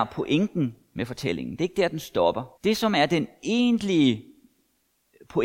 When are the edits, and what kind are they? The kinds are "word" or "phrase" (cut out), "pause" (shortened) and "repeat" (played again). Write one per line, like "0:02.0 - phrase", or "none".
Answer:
0:02.5 - pause